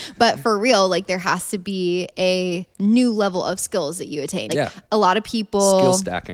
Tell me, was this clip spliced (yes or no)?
yes